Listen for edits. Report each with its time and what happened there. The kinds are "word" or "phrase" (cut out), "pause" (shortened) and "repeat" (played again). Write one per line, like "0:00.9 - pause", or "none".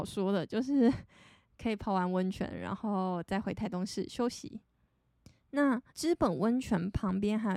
0:05.9 - pause

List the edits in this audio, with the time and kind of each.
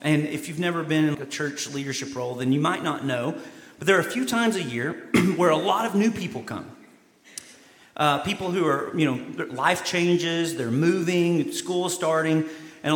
0:01.1 - word

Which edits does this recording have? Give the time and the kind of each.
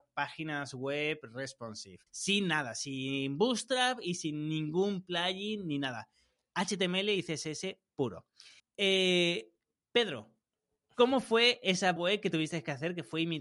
0:02.1 - pause
0:08.6 - pause
0:12.0 - word

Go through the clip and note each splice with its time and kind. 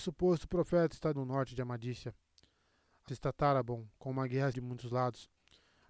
0:01.2 - word
0:03.1 - word
0:04.5 - word

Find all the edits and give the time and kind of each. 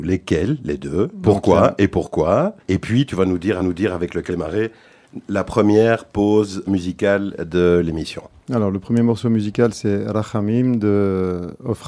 0:01.2 - phrase
0:02.6 - pause
0:03.6 - repeat
0:04.3 - phrase
0:06.7 - word
0:08.4 - pause

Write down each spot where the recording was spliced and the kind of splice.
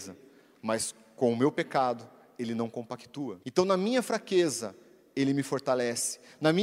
0:03.4 - pause

